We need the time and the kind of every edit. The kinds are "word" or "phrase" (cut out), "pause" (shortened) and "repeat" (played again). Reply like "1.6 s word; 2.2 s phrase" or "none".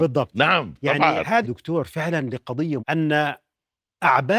1.4 s word; 2.8 s word

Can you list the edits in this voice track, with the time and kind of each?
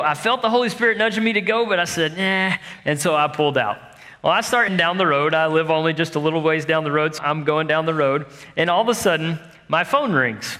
4.7 s word; 7.2 s word

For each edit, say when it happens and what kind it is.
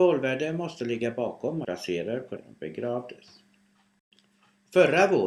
1.6 s phrase; 2.4 s phrase

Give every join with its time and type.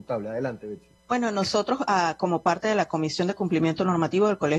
1.0 s pause

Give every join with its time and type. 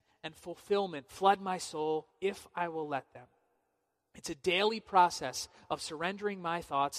2.1 s pause

